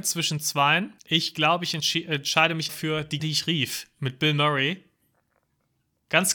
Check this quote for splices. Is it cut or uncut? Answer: cut